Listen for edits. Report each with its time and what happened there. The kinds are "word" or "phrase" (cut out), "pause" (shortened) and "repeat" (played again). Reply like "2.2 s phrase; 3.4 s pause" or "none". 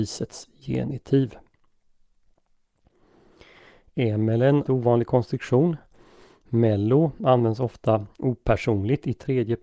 4.7 s phrase